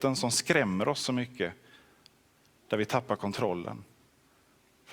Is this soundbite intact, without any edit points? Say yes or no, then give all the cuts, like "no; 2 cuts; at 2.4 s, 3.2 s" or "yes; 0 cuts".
yes; 0 cuts